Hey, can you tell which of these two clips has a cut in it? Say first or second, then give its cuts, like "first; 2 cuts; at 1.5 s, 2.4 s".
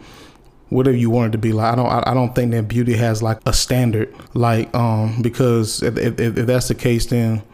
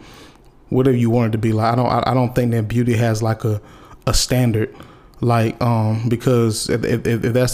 first; 2 cuts; at 3.4 s, 4.3 s